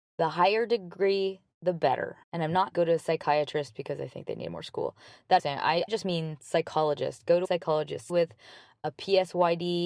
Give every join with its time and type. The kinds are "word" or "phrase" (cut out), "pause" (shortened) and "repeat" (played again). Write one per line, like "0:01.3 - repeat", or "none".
0:02.2 - pause
0:02.7 - word
0:05.4 - phrase
0:05.9 - word
0:07.4 - word
0:08.1 - word